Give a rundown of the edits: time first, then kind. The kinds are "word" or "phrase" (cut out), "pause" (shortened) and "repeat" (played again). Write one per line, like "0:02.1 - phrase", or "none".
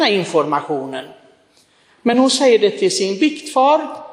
none